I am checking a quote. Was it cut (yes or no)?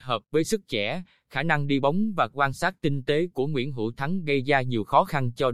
no